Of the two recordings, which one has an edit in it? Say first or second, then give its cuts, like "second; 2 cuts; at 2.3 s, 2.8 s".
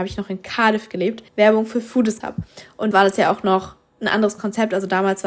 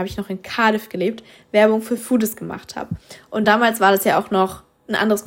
first; 3 cuts; at 1.3 s, 2.2 s, 2.9 s